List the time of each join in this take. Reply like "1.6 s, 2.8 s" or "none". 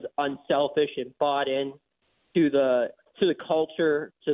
none